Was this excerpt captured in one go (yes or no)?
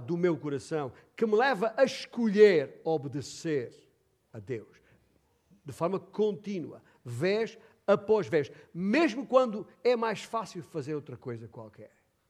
yes